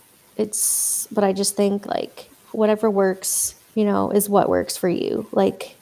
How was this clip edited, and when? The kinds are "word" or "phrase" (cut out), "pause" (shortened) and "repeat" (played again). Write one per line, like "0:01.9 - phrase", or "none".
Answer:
0:03.6 - pause